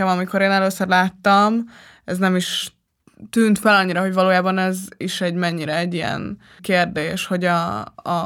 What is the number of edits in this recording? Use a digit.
1